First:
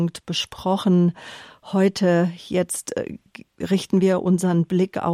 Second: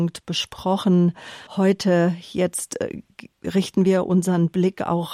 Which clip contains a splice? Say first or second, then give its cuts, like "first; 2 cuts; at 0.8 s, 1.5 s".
second; 1 cut; at 1.5 s